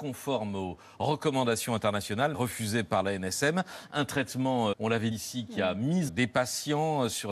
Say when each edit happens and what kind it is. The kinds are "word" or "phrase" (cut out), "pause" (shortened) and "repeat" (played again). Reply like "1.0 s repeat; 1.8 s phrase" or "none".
2.3 s phrase; 4.7 s word; 5.1 s word; 6.1 s phrase